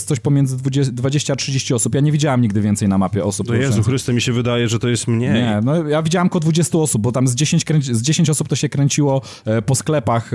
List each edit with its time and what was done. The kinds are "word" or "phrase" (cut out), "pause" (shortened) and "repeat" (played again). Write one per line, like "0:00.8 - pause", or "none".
none